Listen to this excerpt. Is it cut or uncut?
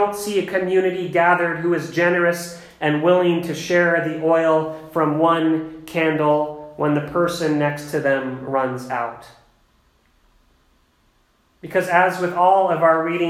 uncut